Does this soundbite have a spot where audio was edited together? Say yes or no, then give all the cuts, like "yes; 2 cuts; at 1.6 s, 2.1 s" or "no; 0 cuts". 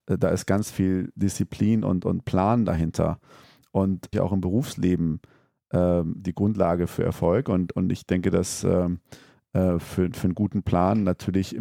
yes; 1 cut; at 4.1 s